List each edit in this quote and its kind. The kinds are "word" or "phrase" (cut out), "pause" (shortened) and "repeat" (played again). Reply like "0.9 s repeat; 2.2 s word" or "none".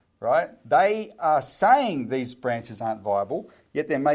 none